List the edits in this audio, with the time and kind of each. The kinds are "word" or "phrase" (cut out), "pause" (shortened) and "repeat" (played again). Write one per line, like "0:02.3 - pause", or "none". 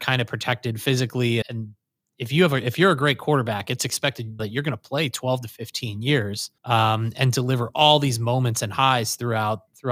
0:01.4 - word
0:04.4 - word
0:06.6 - pause